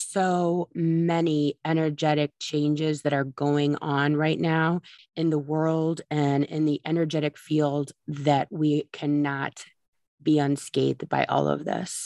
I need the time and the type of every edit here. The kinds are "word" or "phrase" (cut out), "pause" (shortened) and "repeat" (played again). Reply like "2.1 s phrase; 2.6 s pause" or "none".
none